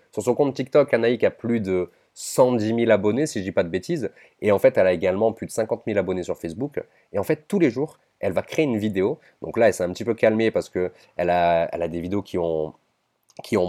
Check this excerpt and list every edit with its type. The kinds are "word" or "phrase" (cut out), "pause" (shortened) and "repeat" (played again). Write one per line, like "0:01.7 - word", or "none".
none